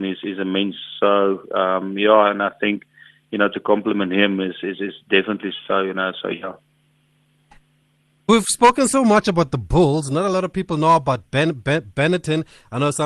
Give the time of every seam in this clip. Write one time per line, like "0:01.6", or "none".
none